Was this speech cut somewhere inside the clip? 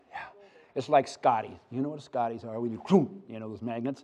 no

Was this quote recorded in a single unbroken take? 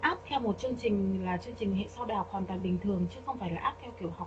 yes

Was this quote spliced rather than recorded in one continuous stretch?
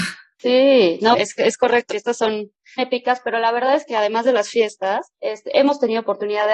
yes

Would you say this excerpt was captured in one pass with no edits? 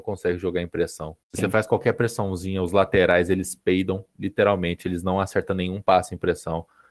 no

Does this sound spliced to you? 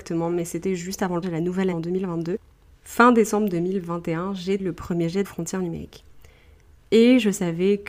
yes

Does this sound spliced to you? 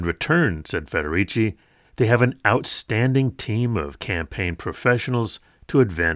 no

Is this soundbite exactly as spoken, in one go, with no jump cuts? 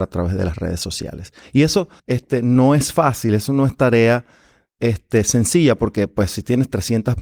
no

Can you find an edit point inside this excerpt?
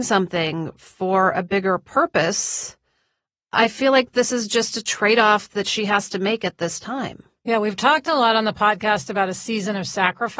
no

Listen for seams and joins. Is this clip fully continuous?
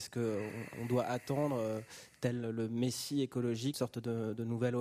no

